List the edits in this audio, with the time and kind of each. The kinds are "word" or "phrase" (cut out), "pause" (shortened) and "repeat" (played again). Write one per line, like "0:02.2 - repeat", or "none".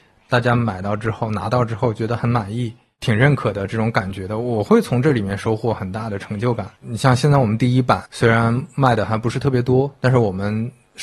0:06.8 - pause
0:08.1 - pause